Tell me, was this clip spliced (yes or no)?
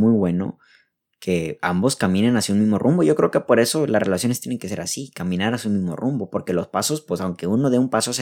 no